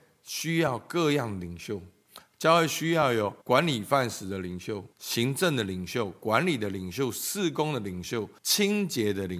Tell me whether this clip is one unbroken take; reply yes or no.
no